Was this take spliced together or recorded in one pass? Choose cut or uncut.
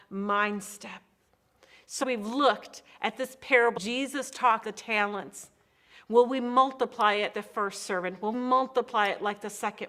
cut